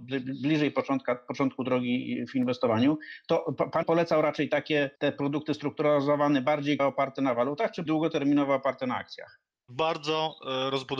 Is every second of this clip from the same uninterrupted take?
no; 4 cuts; at 3.8 s, 4.9 s, 6.8 s, 7.9 s

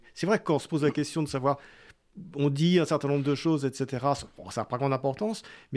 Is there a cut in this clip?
no; 0 cuts

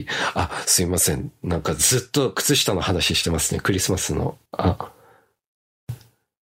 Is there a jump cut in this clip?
yes; 1 cut; at 4.5 s

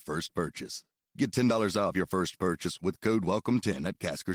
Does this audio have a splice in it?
no; 0 cuts

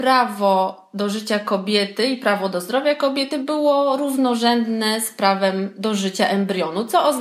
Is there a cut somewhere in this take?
no; 0 cuts

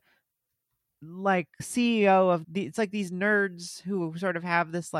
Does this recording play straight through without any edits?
no; 2 cuts; at 1.6 s, 2.4 s

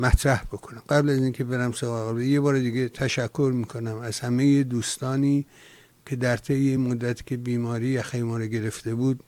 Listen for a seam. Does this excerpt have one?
no; 0 cuts

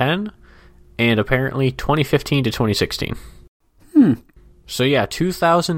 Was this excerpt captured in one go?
yes; 0 cuts

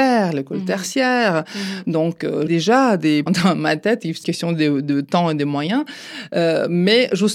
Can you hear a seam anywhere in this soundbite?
yes; 3 cuts; at 2.5 s, 3.3 s, 4.2 s

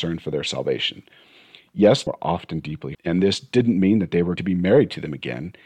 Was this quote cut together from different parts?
yes; 3 cuts; at 2.1 s, 2.9 s, 4.4 s

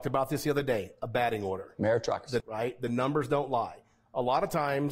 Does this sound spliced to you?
yes; 1 cut; at 2.4 s

